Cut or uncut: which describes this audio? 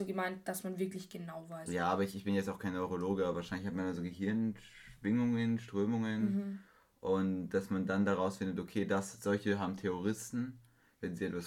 uncut